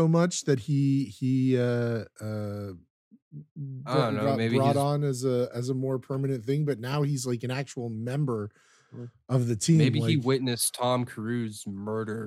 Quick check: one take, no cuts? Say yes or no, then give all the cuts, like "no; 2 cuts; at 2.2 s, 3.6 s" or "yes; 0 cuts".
yes; 0 cuts